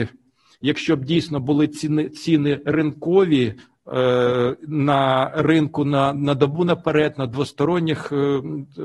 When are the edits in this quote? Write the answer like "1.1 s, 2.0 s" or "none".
none